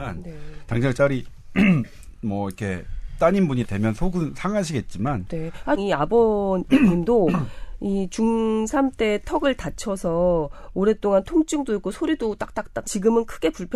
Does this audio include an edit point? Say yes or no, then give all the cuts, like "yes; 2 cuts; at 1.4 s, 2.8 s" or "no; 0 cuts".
yes; 4 cuts; at 0.9 s, 3.6 s, 5.8 s, 12.8 s